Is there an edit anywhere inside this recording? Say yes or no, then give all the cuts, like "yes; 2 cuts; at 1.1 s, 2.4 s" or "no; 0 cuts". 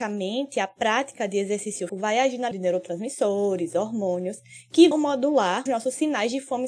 yes; 4 cuts; at 1.9 s, 2.5 s, 4.9 s, 5.7 s